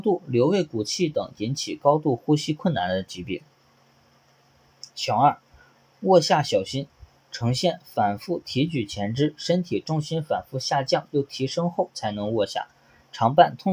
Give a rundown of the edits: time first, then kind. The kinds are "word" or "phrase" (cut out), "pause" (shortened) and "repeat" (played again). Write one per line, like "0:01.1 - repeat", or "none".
none